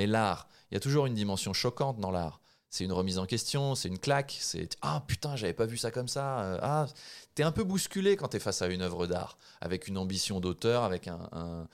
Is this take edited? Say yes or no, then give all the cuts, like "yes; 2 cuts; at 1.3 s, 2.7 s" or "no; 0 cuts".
no; 0 cuts